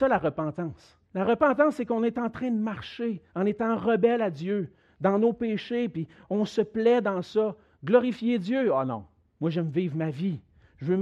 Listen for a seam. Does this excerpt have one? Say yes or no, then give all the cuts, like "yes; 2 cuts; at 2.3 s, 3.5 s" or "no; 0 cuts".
yes; 3 cuts; at 1.1 s, 3.3 s, 9.3 s